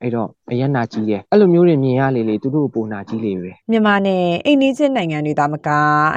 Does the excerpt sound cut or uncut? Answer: cut